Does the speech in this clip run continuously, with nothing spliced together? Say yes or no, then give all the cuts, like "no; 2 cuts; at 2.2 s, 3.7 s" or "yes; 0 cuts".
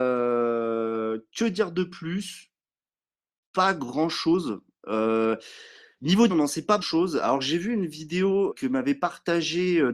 no; 3 cuts; at 6.3 s, 6.8 s, 8.5 s